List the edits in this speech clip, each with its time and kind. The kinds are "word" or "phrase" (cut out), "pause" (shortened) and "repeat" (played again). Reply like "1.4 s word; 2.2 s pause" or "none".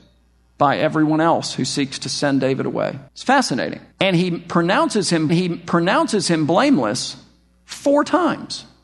3.1 s pause; 3.9 s pause; 5.3 s repeat